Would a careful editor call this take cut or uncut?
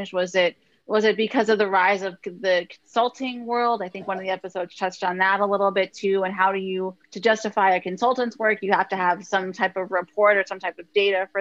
cut